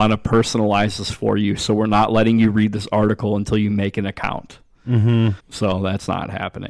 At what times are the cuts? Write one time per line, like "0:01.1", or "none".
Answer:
0:05.4